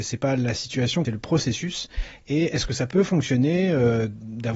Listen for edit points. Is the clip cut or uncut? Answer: cut